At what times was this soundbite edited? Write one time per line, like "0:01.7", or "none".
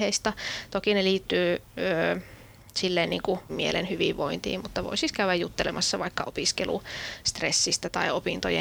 0:03.5